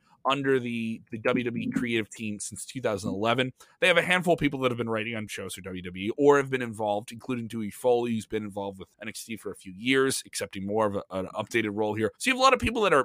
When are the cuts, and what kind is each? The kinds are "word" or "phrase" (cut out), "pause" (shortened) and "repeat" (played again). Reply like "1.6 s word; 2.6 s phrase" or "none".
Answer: 5.3 s word; 8.9 s pause; 12.2 s pause